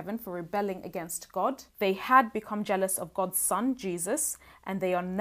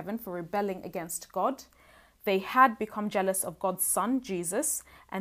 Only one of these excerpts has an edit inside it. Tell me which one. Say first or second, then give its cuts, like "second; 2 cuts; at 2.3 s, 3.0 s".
first; 1 cut; at 1.7 s